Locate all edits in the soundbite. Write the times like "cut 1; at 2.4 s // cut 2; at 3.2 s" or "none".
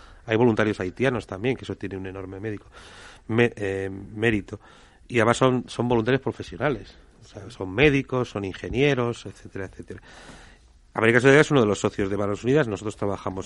none